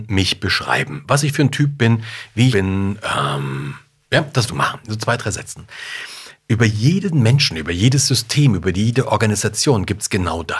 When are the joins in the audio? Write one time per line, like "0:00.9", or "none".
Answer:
0:02.5
0:04.5